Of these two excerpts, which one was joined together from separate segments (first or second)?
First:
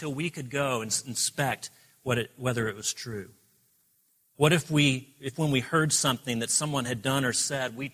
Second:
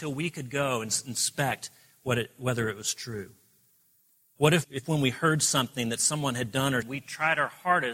second